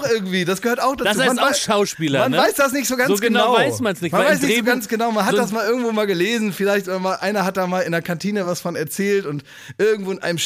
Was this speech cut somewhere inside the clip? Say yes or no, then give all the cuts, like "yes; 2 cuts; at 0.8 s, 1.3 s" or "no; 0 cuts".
no; 0 cuts